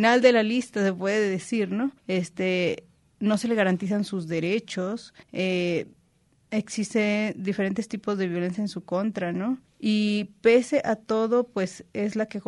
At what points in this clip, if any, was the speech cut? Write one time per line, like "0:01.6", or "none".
0:02.0
0:05.2
0:09.7